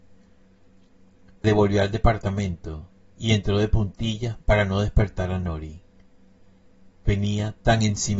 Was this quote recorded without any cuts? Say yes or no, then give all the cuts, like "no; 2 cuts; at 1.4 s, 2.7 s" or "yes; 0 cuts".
no; 1 cut; at 1.4 s